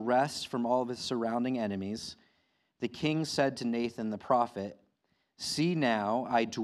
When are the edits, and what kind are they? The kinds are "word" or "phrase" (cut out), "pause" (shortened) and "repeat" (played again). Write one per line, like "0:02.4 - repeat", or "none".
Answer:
none

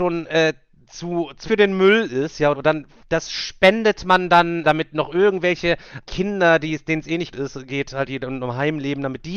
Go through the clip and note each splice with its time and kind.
0:01.5 - word
0:02.5 - word
0:04.6 - word
0:06.0 - word
0:07.3 - word
0:08.1 - word

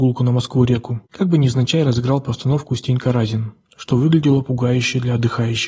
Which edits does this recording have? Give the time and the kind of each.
0:01.0 - pause

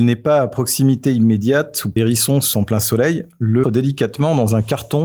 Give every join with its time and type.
0:02.0 - word
0:02.5 - word
0:03.6 - word

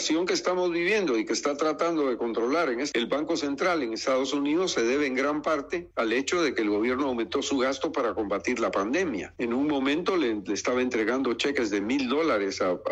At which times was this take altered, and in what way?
0:02.9 - word

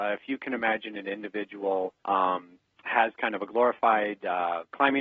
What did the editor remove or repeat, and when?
none

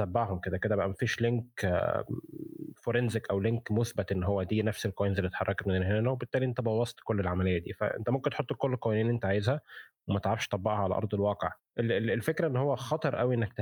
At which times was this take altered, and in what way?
0:11.6 - pause

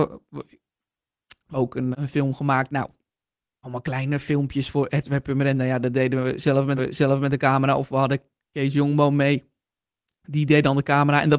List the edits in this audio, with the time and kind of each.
0:01.5 - phrase
0:01.9 - word
0:03.6 - phrase
0:06.8 - repeat

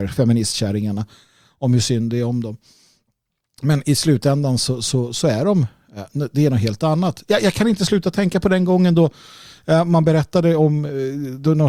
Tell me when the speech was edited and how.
none

